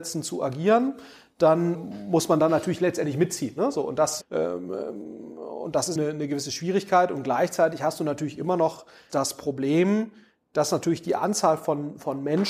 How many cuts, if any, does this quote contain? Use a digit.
4